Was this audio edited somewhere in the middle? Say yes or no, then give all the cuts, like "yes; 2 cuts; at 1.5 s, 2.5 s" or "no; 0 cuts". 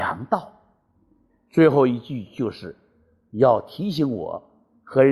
no; 0 cuts